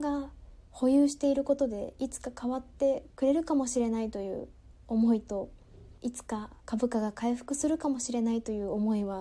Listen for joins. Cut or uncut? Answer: cut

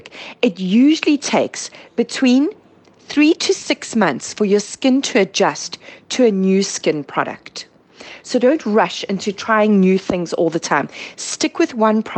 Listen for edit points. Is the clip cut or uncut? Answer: uncut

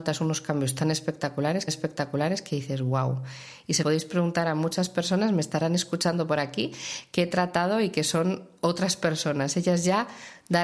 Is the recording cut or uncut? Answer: cut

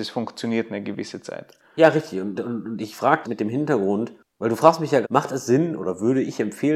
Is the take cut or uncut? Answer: cut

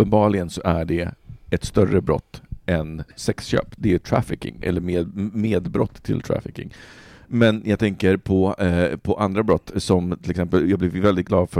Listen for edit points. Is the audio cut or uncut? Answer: uncut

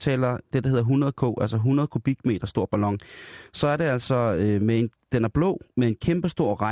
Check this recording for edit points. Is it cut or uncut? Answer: uncut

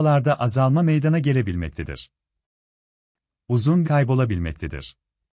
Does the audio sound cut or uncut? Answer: cut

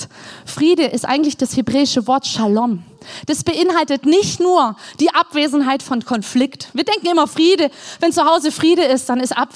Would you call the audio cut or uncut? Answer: uncut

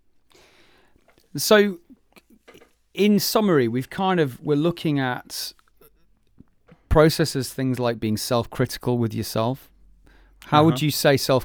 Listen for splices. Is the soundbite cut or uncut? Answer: uncut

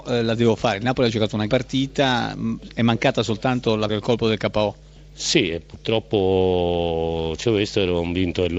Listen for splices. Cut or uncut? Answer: cut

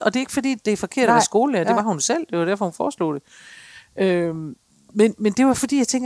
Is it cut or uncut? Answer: uncut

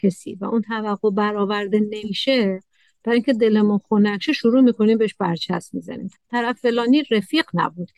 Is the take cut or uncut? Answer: uncut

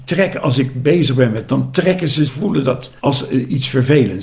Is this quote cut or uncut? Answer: cut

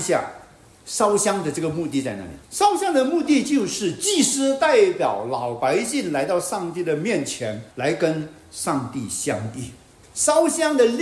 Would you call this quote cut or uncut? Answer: cut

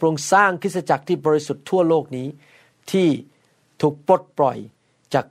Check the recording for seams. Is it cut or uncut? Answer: uncut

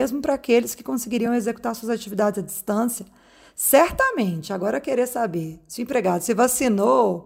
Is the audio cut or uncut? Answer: uncut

